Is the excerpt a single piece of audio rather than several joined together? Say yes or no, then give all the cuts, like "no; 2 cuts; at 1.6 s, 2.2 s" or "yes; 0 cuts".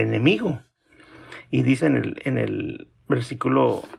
no; 1 cut; at 1.8 s